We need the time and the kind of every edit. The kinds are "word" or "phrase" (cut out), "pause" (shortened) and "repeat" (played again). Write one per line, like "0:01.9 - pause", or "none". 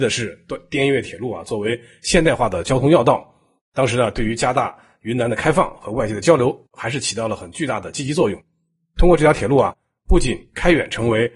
none